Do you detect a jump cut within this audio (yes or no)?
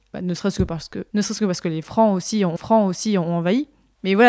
yes